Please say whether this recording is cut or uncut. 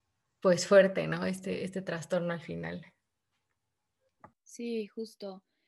cut